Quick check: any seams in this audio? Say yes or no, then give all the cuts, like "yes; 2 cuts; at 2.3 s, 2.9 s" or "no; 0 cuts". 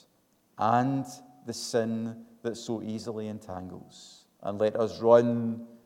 yes; 1 cut; at 4.3 s